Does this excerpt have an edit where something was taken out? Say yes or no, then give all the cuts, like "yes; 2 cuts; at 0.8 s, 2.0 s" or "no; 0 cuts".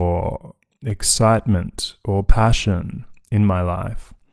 no; 0 cuts